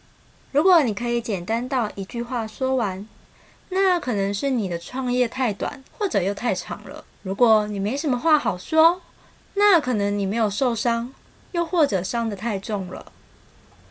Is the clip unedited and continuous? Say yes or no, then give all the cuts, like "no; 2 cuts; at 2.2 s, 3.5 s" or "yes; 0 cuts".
no; 2 cuts; at 5.9 s, 7.1 s